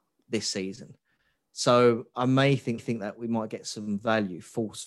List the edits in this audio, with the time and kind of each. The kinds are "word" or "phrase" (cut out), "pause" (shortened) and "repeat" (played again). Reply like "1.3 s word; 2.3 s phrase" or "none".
2.1 s word; 2.8 s repeat